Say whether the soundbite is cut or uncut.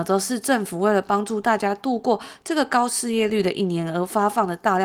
uncut